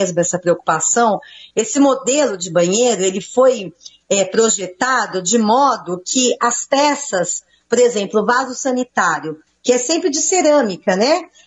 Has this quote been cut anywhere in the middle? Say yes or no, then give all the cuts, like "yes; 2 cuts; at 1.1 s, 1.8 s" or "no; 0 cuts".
no; 0 cuts